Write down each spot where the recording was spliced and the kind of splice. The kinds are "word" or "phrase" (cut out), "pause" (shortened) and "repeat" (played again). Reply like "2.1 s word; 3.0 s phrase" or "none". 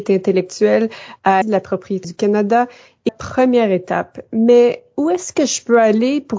1.4 s word; 2.0 s word; 3.1 s word